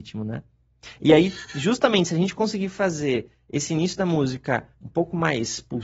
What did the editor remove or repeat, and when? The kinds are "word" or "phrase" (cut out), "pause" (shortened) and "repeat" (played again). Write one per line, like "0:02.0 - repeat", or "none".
0:04.7 - pause